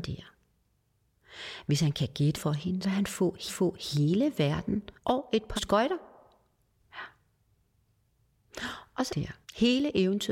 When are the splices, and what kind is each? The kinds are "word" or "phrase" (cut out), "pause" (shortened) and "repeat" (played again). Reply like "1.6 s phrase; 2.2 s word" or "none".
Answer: 2.3 s word; 2.8 s word; 3.5 s repeat; 5.0 s pause; 5.6 s word; 9.1 s phrase; 9.4 s pause